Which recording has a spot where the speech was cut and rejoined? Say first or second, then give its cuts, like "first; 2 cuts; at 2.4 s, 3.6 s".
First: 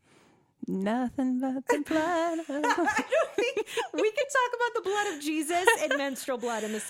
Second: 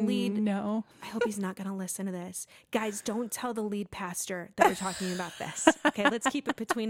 second; 1 cut; at 0.9 s